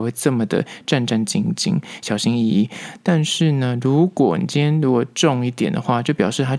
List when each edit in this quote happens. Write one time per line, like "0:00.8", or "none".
none